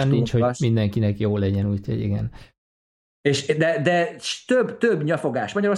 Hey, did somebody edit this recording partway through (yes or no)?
no